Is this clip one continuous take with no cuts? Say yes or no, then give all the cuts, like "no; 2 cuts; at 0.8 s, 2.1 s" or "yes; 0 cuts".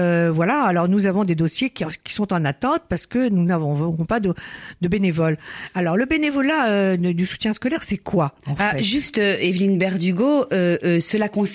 yes; 0 cuts